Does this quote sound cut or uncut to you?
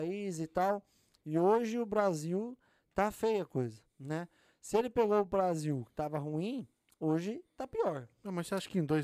uncut